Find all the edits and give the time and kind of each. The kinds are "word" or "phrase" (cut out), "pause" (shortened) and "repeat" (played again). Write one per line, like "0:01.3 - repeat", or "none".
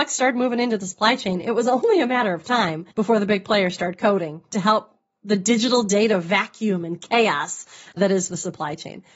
0:02.9 - pause
0:08.0 - word